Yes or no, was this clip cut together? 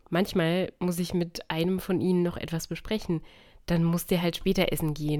no